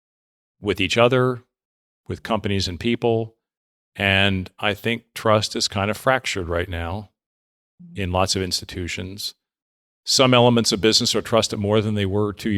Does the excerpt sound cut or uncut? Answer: uncut